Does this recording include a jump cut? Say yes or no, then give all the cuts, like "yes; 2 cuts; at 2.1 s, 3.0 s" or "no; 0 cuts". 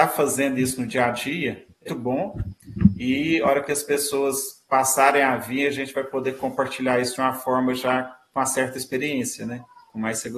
yes; 1 cut; at 1.9 s